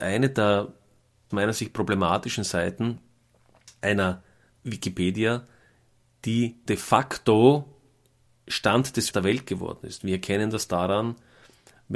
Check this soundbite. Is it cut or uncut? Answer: cut